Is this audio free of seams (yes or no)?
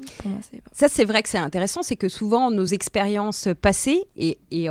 yes